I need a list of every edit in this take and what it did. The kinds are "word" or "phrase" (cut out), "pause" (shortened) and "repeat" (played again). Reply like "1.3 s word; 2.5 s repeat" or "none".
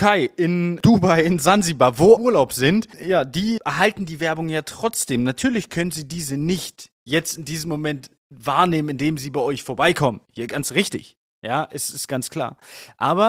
2.2 s phrase; 3.6 s word